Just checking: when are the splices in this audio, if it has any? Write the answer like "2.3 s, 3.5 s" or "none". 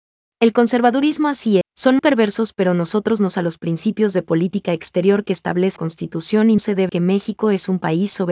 1.6 s, 2.0 s, 3.3 s, 5.8 s, 6.6 s, 6.9 s